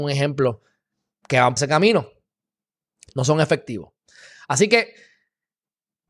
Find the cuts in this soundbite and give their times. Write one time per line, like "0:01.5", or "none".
0:01.6